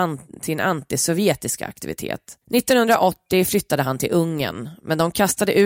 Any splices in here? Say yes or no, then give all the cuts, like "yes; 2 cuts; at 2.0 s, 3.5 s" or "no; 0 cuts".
yes; 1 cut; at 2.4 s